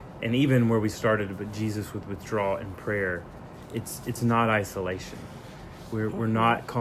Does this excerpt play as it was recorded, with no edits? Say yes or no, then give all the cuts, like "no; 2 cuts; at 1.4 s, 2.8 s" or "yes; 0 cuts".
yes; 0 cuts